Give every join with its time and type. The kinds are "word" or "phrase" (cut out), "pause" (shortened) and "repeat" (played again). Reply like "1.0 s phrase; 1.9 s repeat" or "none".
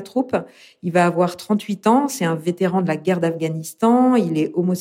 none